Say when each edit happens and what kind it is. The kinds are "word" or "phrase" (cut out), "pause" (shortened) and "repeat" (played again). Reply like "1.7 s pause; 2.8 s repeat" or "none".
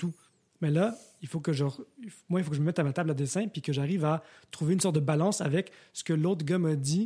none

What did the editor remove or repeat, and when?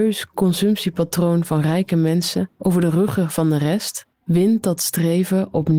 4.1 s pause

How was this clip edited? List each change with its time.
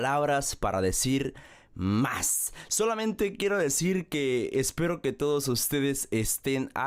none

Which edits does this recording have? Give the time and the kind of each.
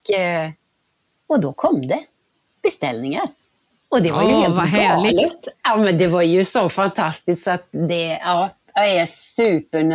none

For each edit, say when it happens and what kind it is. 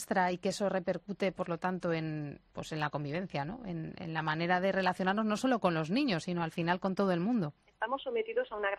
7.6 s pause

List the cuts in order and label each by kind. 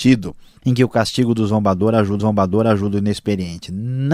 2.2 s repeat

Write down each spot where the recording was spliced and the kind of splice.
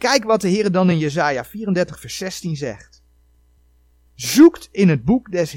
none

